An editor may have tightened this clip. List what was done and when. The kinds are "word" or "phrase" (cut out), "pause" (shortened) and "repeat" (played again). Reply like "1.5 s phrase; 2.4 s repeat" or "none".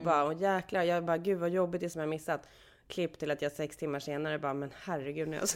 1.9 s phrase